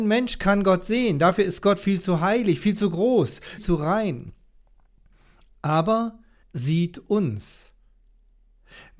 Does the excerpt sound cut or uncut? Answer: cut